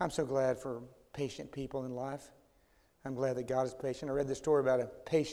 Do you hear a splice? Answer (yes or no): no